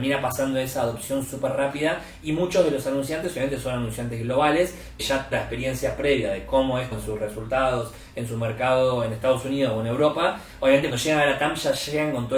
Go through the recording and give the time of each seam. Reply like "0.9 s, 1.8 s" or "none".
5.0 s, 5.3 s, 6.9 s, 10.9 s